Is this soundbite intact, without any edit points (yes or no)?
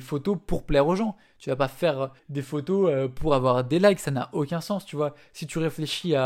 no